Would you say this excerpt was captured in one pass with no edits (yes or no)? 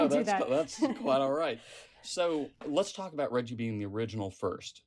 yes